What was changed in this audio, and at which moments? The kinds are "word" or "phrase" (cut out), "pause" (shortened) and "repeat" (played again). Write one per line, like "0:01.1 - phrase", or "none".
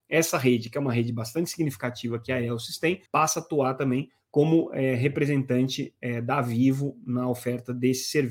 0:03.1 - pause